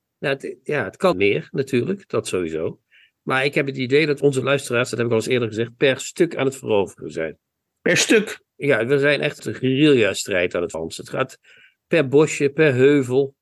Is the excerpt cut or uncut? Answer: cut